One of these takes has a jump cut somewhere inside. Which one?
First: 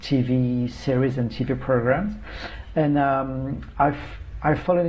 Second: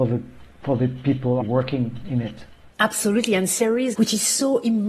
second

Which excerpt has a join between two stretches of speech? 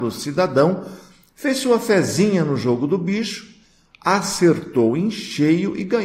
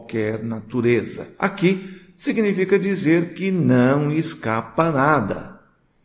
second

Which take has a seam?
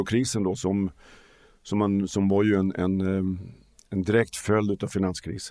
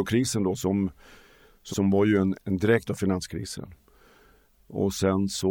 second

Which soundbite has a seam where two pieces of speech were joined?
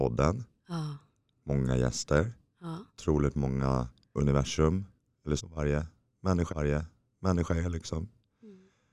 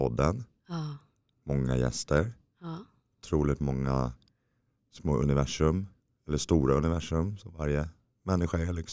first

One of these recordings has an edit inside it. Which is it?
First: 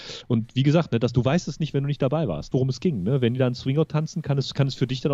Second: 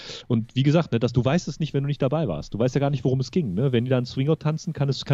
first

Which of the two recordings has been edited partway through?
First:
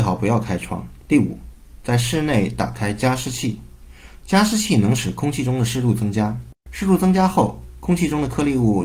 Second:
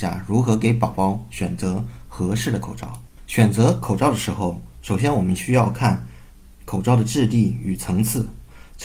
first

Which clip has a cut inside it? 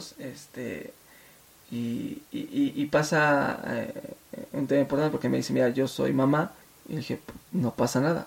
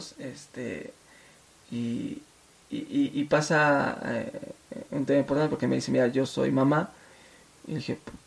first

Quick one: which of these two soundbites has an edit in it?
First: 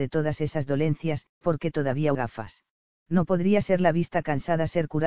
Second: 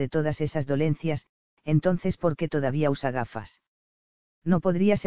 first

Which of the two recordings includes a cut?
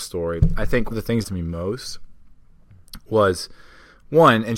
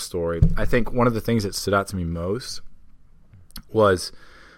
first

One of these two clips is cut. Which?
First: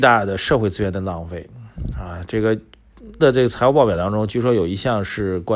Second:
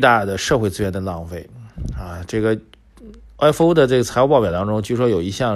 first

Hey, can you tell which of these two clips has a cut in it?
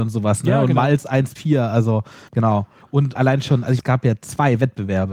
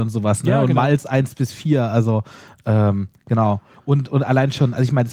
first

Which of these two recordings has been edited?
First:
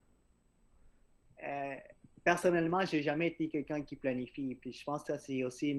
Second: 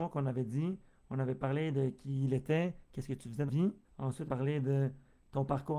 second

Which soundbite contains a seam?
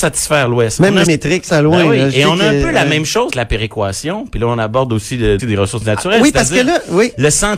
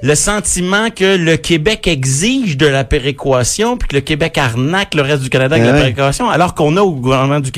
first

